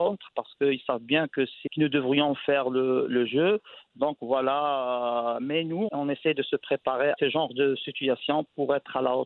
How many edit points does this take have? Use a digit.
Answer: 3